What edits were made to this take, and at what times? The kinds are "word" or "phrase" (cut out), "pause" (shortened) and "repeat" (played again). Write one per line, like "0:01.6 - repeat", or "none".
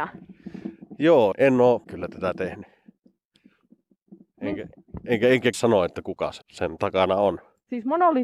0:01.3 - word
0:01.8 - word
0:05.5 - phrase
0:06.4 - pause

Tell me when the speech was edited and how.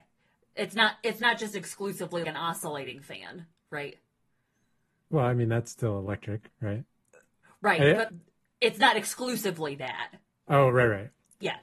0:02.2 - word
0:08.1 - word

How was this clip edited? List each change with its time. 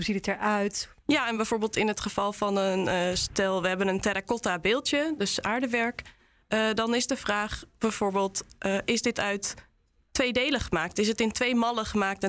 none

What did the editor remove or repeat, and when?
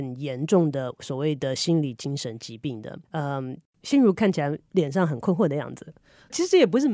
0:03.0 - pause

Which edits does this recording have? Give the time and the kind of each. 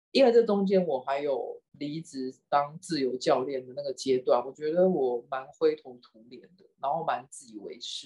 0:01.7 - pause

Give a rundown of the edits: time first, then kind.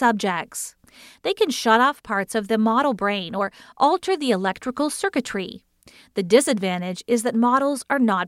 none

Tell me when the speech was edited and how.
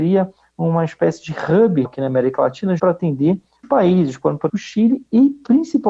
0:01.8 - word
0:02.8 - word
0:03.6 - word
0:04.5 - word

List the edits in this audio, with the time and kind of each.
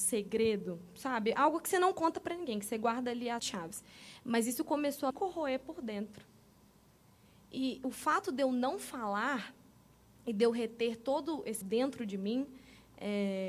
0:03.4 - word
0:05.1 - word
0:11.6 - word

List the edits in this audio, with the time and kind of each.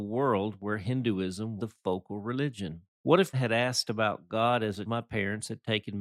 0:01.6 - word
0:02.9 - pause
0:03.3 - phrase
0:04.9 - word

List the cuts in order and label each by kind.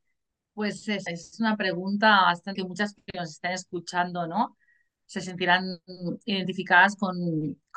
0:01.1 - word
0:02.6 - word
0:03.0 - word

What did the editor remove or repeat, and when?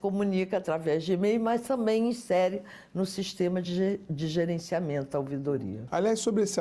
none

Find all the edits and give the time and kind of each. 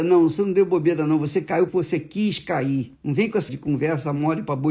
0:01.7 - word
0:03.0 - pause
0:03.5 - word

